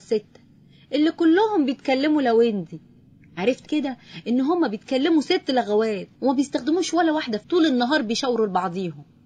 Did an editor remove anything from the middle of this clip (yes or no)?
yes